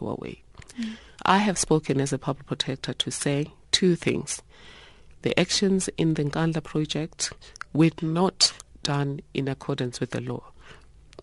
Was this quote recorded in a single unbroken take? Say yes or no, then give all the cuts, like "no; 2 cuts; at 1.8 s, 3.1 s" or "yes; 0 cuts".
yes; 0 cuts